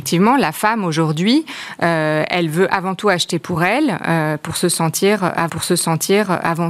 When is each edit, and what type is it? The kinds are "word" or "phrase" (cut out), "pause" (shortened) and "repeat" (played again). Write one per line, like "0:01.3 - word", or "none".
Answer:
0:05.5 - repeat